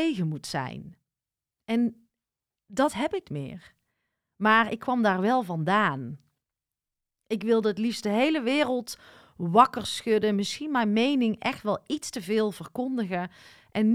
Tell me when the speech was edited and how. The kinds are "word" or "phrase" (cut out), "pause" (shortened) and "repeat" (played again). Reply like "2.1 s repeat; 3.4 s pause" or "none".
3.2 s word

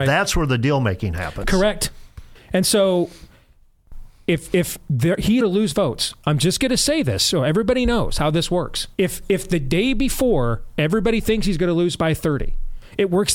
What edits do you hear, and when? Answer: 5.4 s phrase; 8.9 s pause

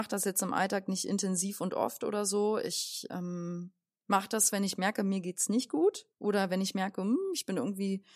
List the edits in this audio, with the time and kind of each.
6.1 s pause

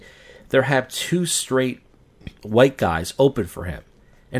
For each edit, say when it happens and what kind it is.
2.4 s pause

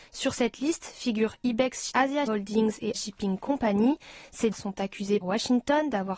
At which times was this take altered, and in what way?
1.9 s word; 2.3 s word; 2.9 s word; 4.5 s word; 5.2 s word

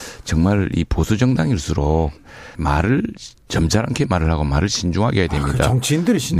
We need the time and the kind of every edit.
2.5 s word

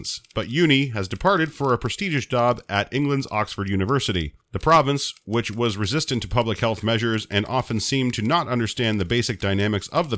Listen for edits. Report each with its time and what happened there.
none

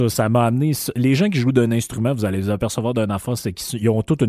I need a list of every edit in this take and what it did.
none

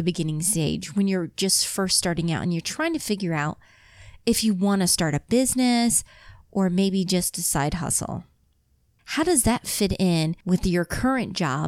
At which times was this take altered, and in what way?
none

